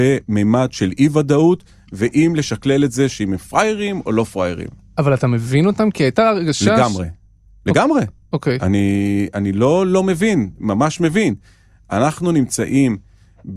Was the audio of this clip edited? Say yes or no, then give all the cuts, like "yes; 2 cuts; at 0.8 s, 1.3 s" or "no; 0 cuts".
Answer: no; 0 cuts